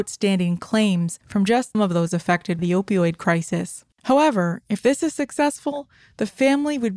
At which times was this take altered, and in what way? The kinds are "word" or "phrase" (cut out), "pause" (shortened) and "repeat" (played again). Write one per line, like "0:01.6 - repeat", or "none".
0:01.2 - pause
0:01.7 - word
0:02.6 - word
0:03.9 - pause

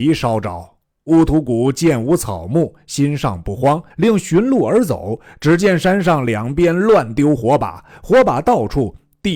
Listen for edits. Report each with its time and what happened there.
0:03.9 - pause

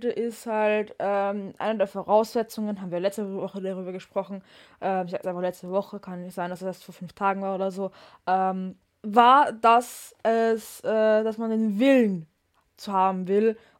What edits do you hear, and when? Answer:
0:05.2 - phrase
0:08.9 - pause
0:10.2 - pause

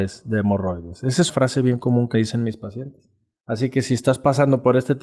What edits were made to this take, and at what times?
0:01.3 - word
0:02.1 - word

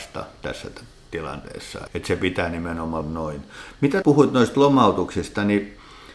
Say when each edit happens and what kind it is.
0:01.9 - word
0:03.0 - word
0:04.0 - word

